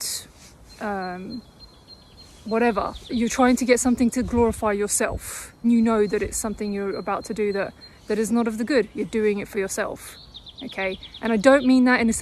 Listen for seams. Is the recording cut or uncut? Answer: cut